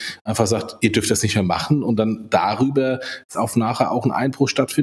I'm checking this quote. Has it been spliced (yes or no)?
yes